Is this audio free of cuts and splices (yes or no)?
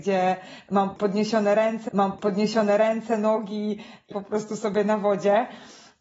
no